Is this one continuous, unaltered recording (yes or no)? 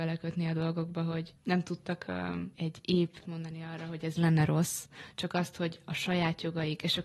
no